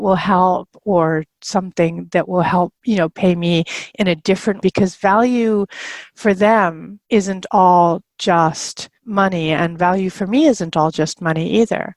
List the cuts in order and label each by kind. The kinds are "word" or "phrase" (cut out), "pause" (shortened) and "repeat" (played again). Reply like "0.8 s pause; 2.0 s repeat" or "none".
2.8 s pause; 4.6 s word; 7.0 s pause; 9.0 s pause